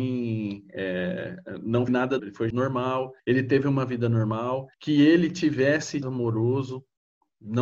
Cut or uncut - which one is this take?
cut